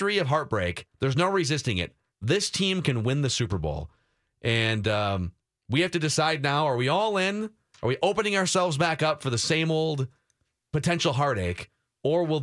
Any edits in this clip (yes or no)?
no